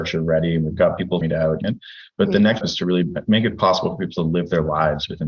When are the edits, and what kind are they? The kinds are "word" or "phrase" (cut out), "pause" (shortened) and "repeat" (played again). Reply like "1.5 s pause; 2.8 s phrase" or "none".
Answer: 1.2 s word; 1.6 s word; 2.6 s word